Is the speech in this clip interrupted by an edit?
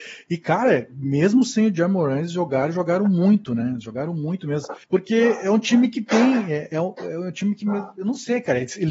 yes; 1 cut; at 4.8 s

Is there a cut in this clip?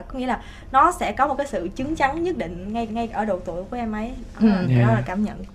yes; 1 cut; at 2.9 s

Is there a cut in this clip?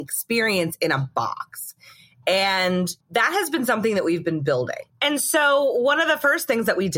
yes; 1 cut; at 3.0 s

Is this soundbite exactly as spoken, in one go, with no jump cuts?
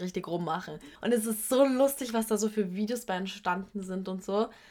no; 1 cut; at 1.0 s

